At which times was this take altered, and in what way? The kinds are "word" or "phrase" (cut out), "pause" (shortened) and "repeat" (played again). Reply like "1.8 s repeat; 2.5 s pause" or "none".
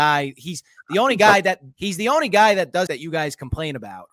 1.7 s pause; 2.9 s word